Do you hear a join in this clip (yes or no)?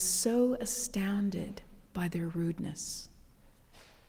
no